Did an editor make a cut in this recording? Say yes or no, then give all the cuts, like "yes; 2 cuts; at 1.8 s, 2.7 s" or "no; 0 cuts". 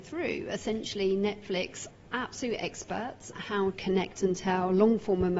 yes; 3 cuts; at 1.9 s, 3.3 s, 3.7 s